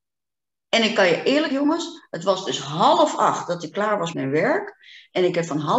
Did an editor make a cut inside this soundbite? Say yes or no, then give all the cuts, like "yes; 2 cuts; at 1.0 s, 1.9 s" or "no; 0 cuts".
yes; 2 cuts; at 1.5 s, 4.1 s